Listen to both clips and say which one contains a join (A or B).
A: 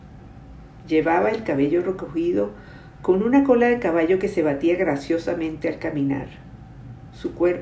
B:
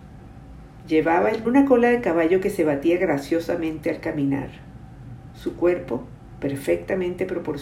B